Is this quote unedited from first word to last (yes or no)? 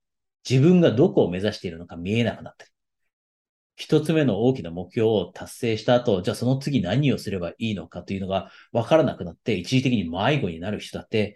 yes